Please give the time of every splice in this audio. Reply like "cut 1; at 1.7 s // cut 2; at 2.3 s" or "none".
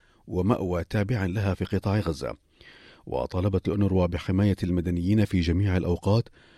none